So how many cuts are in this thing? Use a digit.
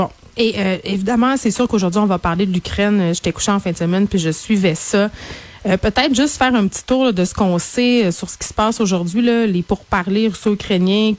0